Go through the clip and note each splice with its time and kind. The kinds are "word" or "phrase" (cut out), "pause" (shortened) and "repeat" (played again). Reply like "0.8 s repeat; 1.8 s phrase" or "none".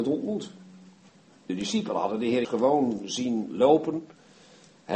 2.4 s word